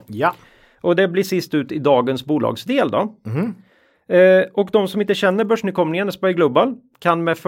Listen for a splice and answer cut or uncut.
uncut